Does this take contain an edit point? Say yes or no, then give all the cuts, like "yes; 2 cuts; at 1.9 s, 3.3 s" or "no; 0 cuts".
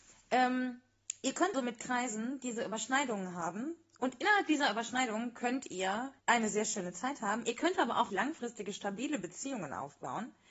yes; 3 cuts; at 1.5 s, 6.2 s, 8.1 s